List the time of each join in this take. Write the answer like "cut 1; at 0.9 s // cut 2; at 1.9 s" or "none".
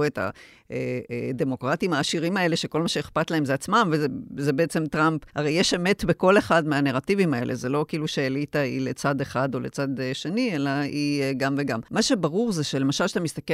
cut 1; at 5.3 s // cut 2; at 11.9 s